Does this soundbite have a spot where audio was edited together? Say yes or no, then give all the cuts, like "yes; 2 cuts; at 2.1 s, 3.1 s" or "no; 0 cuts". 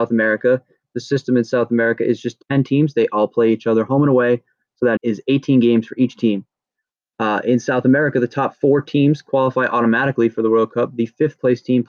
yes; 1 cut; at 5.0 s